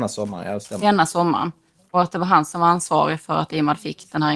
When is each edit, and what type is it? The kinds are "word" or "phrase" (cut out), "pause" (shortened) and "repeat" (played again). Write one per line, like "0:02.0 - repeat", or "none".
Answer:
none